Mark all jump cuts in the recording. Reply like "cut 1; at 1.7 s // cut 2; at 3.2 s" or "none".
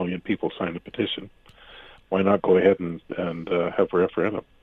none